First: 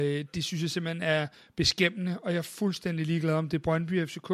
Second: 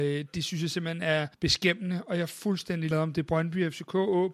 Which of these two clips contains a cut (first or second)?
second